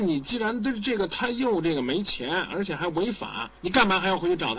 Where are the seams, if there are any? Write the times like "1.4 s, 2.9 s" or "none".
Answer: 3.6 s